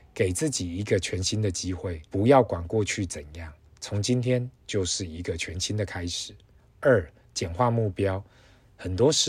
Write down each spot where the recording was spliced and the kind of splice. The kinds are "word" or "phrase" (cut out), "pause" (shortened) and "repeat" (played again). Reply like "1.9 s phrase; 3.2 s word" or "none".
2.1 s pause; 6.6 s pause